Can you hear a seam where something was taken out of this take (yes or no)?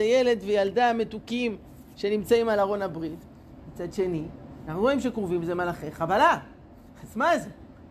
no